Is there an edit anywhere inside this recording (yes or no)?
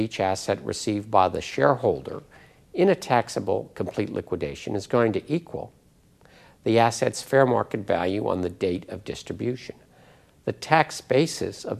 no